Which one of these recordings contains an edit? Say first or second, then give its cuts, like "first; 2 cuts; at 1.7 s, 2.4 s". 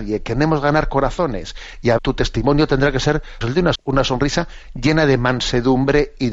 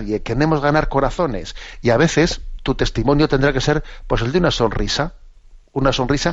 first; 3 cuts; at 2.0 s, 3.4 s, 3.7 s